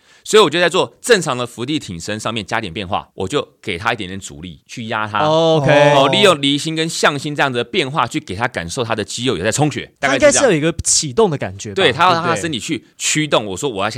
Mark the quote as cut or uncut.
uncut